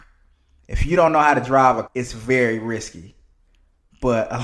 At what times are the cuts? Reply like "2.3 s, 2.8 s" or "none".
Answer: 1.8 s

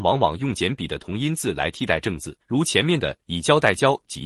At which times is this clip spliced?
2.4 s

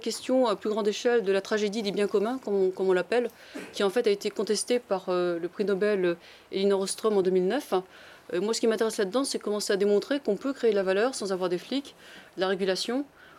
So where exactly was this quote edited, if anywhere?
none

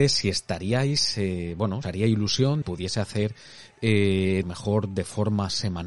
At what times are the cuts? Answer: 1.8 s, 2.6 s, 4.4 s

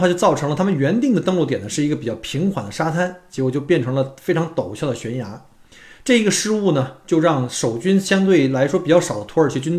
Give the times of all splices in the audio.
none

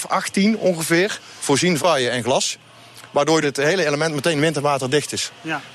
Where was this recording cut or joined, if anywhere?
1.8 s, 3.4 s

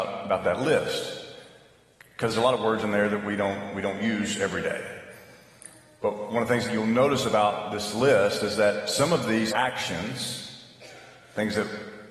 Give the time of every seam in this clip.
2.3 s, 9.5 s

